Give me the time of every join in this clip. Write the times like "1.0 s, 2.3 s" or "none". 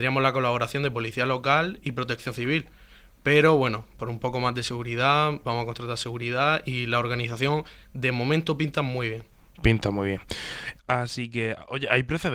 none